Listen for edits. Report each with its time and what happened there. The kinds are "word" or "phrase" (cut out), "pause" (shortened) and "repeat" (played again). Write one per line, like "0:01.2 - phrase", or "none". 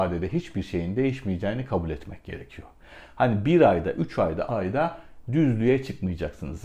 0:04.5 - word